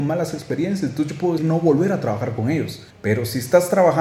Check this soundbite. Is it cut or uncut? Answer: cut